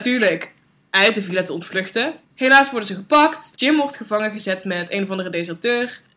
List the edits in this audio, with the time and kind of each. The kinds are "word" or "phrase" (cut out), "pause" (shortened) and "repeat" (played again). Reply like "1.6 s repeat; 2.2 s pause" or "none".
2.2 s pause